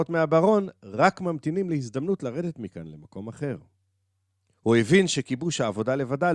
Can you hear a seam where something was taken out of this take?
no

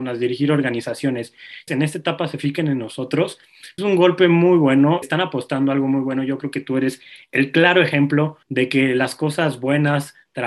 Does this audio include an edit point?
yes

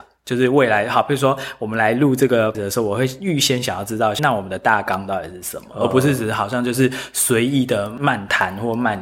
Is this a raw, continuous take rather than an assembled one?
no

